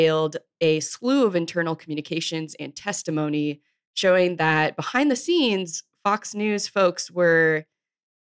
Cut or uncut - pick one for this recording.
uncut